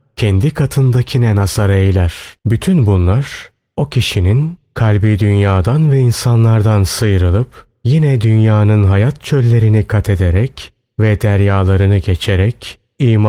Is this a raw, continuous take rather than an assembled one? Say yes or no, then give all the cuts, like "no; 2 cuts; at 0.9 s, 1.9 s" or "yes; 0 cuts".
no; 1 cut; at 2.4 s